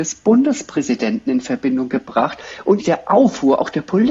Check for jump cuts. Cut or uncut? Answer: cut